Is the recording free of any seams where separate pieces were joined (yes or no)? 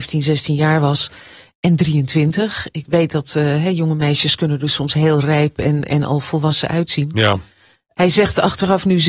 yes